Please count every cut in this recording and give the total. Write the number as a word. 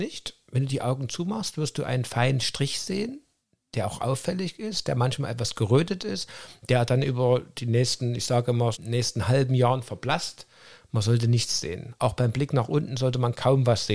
one